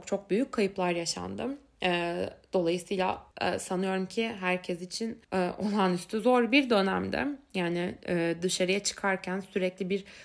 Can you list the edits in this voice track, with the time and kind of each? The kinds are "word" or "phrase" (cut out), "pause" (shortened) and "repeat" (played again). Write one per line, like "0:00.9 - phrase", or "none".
0:03.3 - pause
0:05.2 - pause